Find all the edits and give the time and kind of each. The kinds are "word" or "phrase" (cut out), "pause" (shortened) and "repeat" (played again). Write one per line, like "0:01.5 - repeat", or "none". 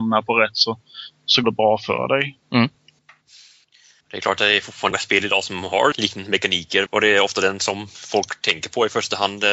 0:01.4 - word
0:04.9 - word
0:05.9 - word
0:06.9 - word